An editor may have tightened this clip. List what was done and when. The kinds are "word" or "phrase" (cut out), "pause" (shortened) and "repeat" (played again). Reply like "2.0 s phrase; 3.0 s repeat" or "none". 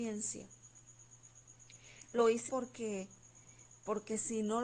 2.5 s word